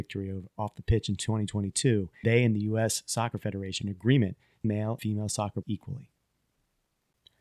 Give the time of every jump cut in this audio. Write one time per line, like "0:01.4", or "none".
0:02.2
0:03.8
0:04.6
0:05.0
0:05.6

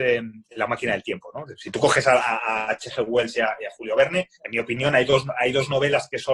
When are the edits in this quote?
0:04.3

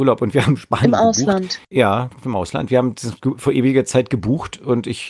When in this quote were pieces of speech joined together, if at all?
0:01.6

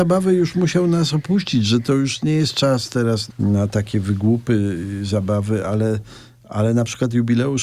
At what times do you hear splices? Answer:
0:03.3

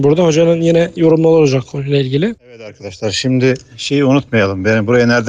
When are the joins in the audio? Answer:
0:02.4

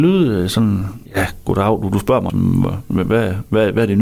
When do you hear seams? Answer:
0:01.1
0:02.3

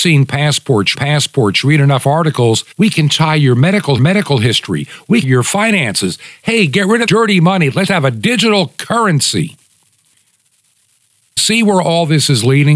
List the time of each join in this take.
0:00.9
0:02.7
0:04.0
0:05.2
0:07.1
0:07.9
0:11.4

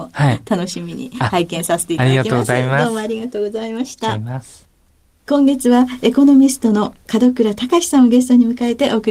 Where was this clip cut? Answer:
none

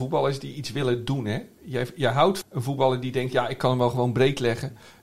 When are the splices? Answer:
0:02.4

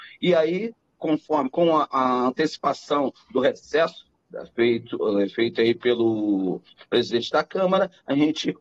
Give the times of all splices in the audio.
none

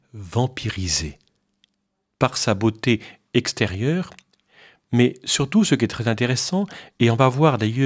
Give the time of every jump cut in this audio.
none

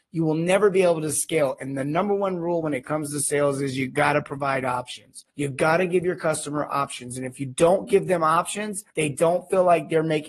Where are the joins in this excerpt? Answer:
0:05.3
0:08.9

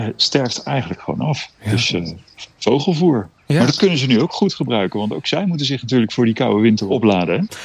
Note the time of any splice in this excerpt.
0:02.5

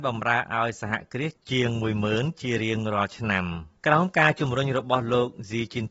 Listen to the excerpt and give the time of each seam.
0:03.8

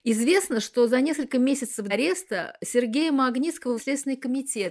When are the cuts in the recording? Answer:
0:01.9
0:03.8

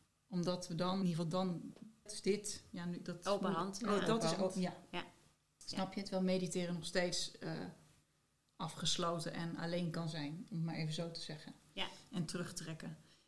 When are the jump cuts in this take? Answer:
0:01.0
0:02.1

